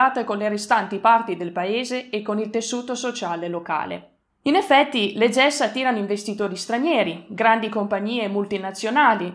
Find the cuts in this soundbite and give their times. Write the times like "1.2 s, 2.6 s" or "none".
none